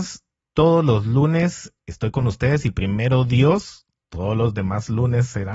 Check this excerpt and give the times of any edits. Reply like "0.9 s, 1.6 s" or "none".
none